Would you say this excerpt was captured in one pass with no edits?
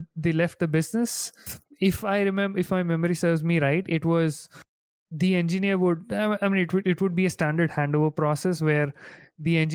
yes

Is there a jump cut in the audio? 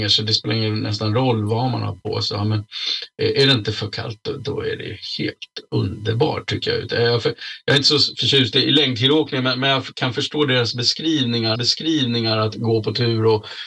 yes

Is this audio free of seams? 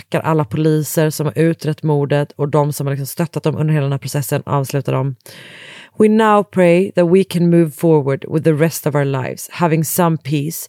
no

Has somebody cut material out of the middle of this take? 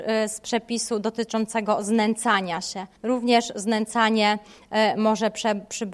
yes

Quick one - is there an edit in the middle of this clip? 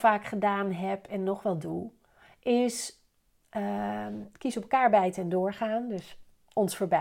no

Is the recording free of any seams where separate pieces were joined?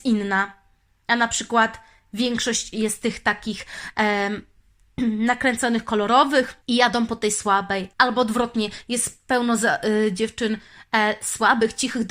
no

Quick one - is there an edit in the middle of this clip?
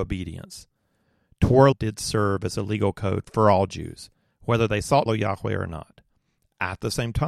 yes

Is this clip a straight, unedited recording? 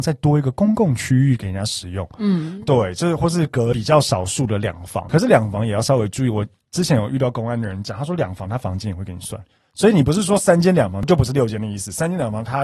yes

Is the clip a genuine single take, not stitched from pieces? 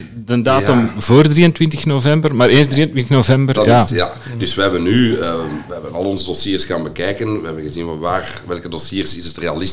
yes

